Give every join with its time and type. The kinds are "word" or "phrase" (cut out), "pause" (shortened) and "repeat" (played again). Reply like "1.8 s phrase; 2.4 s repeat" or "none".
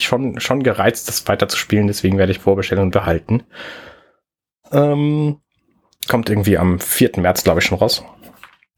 2.4 s word; 2.9 s word; 6.1 s word